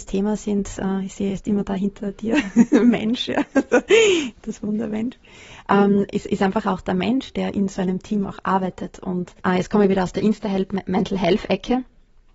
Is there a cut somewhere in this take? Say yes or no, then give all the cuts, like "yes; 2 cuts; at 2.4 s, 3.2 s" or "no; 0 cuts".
yes; 1 cut; at 9.4 s